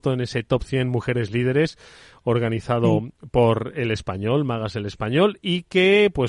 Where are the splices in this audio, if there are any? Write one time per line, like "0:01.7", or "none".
none